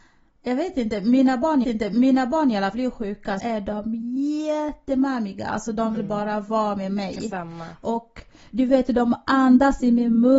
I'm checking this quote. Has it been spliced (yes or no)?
yes